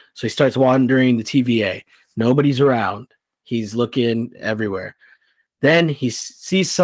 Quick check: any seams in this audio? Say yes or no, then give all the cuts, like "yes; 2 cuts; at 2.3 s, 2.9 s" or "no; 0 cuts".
no; 0 cuts